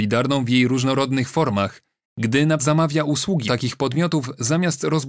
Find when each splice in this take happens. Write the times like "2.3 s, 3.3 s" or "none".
2.6 s, 3.5 s